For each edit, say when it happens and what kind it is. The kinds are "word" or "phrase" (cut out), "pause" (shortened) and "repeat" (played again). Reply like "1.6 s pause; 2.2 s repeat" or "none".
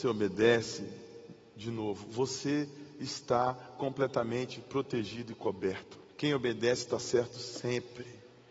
6.1 s pause